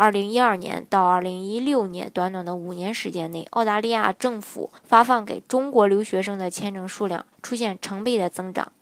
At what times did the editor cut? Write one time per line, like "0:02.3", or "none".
0:04.8
0:07.3

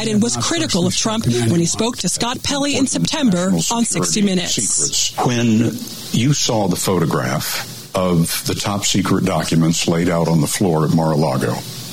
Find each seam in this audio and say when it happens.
none

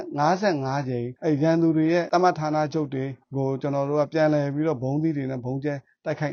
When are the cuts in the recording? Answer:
0:01.2
0:03.2

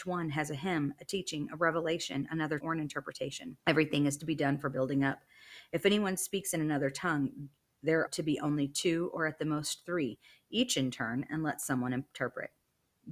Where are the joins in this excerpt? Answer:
0:02.6
0:03.6
0:08.1

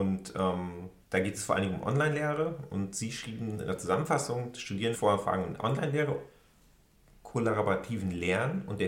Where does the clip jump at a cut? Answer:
0:01.0
0:04.9

